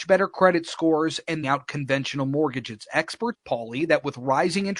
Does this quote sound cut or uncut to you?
cut